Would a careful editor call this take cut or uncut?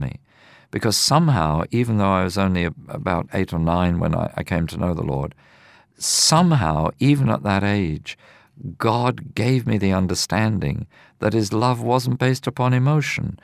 uncut